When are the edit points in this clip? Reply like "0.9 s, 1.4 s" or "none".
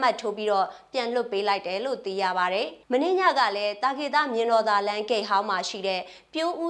2.8 s